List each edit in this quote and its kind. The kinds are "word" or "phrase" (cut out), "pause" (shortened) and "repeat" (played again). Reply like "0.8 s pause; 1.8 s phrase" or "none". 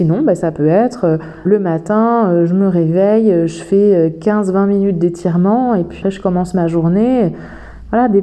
1.5 s word; 6.0 s word